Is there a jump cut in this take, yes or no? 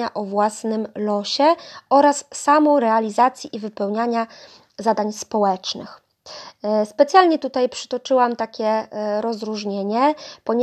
no